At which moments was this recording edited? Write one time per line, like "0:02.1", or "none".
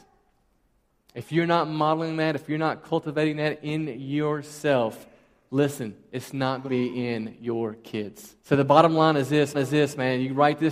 0:06.7
0:08.4
0:09.5